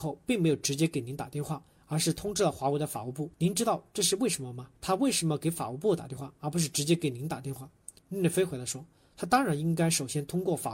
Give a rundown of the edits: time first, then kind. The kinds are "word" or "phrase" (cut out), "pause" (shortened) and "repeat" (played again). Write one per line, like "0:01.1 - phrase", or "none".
0:03.3 - pause
0:04.8 - pause
0:08.0 - pause